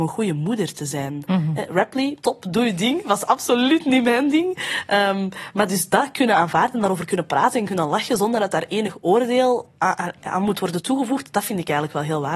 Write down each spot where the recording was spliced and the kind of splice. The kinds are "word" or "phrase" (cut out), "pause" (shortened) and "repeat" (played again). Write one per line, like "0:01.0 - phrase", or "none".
0:02.2 - pause
0:09.8 - pause